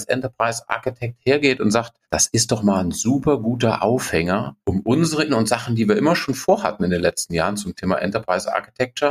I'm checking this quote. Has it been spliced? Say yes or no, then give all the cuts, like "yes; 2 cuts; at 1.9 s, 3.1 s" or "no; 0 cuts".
yes; 3 cuts; at 2.0 s, 4.6 s, 5.3 s